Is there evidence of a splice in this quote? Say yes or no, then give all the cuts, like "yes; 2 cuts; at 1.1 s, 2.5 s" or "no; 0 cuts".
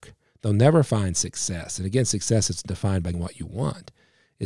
yes; 1 cut; at 3.1 s